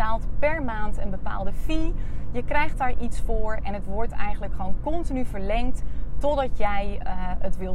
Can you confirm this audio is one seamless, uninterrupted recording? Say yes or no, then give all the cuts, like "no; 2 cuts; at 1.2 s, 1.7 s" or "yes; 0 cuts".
yes; 0 cuts